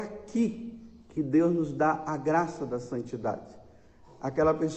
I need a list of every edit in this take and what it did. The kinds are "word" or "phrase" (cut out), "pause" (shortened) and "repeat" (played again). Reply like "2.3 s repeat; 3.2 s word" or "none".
none